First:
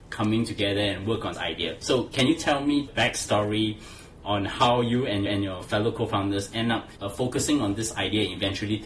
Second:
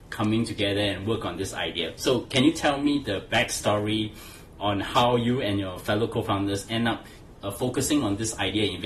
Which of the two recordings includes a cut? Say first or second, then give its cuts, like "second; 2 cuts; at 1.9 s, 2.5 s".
first; 4 cuts; at 1.3 s, 2.9 s, 5.3 s, 7.0 s